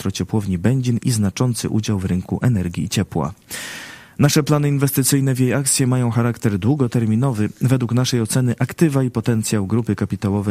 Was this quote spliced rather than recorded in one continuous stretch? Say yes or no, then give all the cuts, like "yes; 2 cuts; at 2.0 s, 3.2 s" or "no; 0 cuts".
no; 0 cuts